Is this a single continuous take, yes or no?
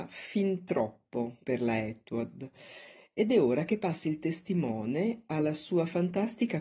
yes